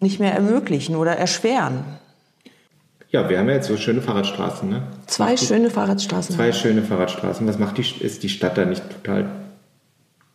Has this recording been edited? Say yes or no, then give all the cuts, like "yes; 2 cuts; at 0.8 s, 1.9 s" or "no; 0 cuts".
no; 0 cuts